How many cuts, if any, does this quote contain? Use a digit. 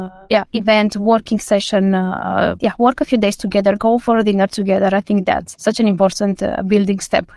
0